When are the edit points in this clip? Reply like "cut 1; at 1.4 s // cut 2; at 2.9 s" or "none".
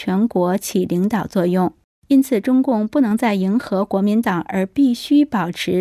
cut 1; at 1.8 s